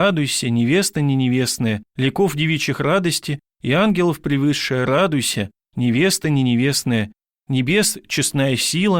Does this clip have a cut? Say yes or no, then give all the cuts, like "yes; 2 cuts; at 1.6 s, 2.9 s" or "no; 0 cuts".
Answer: yes; 1 cut; at 1.9 s